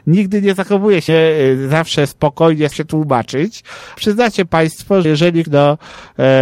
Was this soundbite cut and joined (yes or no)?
yes